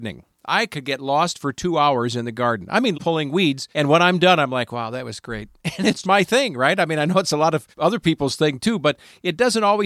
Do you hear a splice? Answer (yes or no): yes